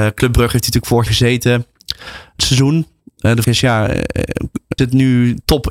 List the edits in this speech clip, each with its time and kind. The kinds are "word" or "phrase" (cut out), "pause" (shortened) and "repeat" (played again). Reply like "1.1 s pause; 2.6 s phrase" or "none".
1.1 s word; 2.4 s word; 3.4 s word; 4.8 s word